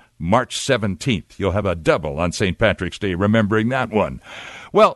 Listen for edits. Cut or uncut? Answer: uncut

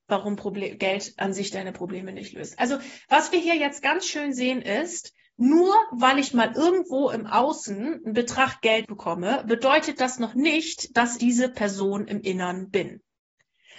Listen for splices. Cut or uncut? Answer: cut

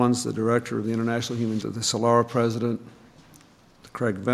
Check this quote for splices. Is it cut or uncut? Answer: cut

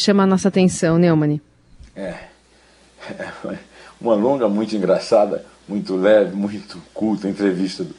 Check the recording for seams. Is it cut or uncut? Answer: uncut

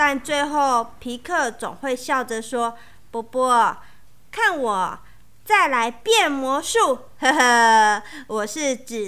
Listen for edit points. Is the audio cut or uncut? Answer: uncut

